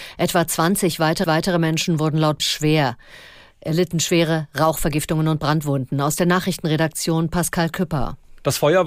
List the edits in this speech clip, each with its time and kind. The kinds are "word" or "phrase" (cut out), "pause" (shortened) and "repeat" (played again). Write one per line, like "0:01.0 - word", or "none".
0:01.2 - repeat
0:02.4 - phrase